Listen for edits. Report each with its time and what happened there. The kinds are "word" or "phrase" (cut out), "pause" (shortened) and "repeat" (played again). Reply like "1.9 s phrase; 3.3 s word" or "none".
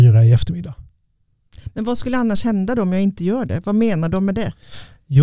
none

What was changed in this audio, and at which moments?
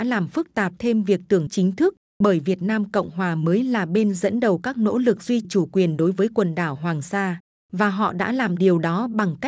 1.5 s word; 5.4 s word

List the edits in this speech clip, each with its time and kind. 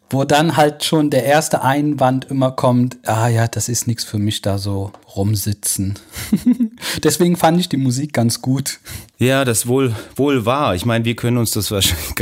9.1 s pause

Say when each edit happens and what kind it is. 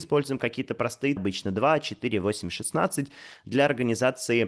1.2 s phrase

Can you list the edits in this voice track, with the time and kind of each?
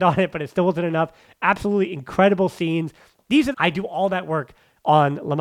3.5 s phrase

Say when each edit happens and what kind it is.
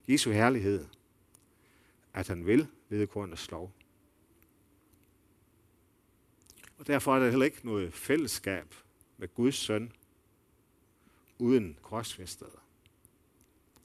6.7 s pause; 9.0 s pause; 11.8 s phrase

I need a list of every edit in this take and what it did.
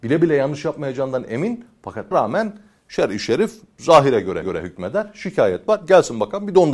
2.1 s word; 4.4 s repeat

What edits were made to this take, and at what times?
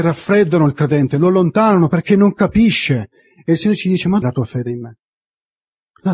4.2 s word

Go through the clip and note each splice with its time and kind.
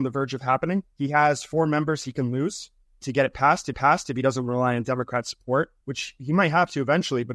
0.9 s pause; 3.7 s repeat; 5.8 s pause

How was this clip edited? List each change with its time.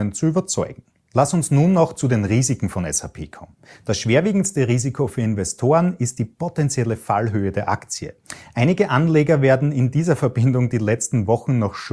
none

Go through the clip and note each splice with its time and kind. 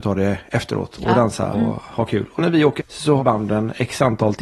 1.5 s word; 2.4 s word; 2.8 s word; 3.2 s word

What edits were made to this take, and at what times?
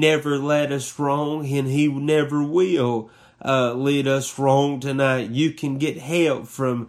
none

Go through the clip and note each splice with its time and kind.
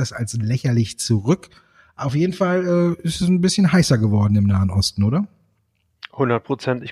none

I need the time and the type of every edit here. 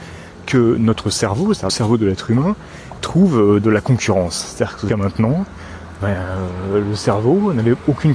1.7 s word; 3.0 s word; 4.9 s word; 6.0 s word

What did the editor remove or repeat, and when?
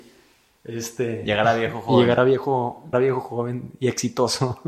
2.9 s word

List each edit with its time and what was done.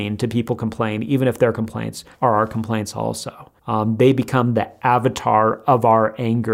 2.1 s pause; 3.6 s pause

